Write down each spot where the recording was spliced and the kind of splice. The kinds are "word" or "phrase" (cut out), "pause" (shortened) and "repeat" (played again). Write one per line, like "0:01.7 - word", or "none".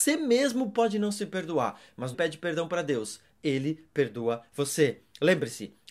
0:02.1 - phrase